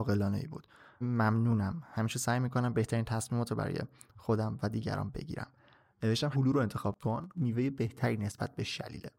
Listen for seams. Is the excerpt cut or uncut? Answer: cut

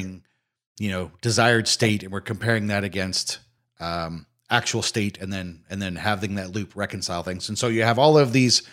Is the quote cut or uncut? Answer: uncut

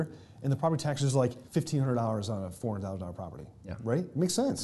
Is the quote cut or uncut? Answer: cut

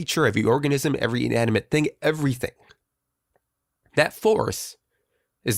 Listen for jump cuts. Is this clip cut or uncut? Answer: uncut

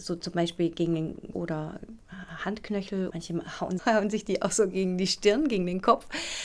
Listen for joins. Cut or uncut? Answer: cut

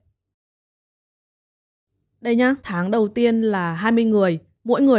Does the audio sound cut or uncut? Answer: cut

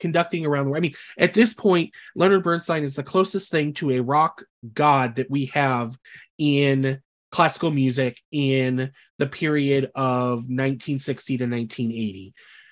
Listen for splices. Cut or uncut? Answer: uncut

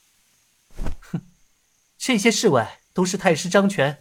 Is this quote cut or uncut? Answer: uncut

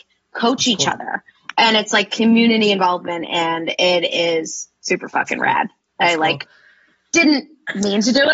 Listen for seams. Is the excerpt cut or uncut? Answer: uncut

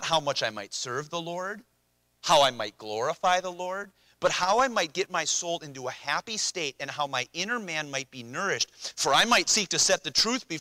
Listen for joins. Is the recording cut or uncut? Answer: uncut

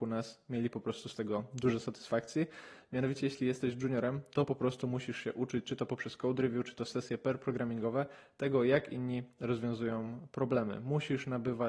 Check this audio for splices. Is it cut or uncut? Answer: uncut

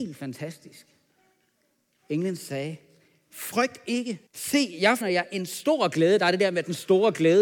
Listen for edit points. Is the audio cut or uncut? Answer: cut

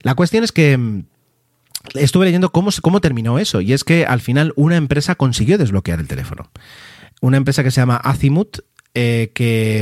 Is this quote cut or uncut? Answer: uncut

